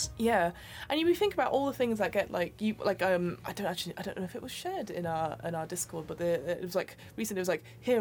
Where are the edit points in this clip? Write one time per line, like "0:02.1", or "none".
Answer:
none